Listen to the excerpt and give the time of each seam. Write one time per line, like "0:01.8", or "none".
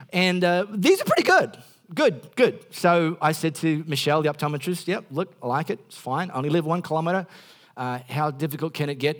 none